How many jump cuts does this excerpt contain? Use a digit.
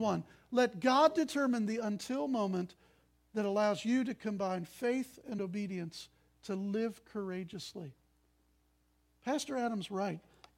0